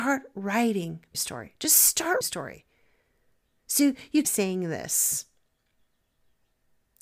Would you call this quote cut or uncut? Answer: cut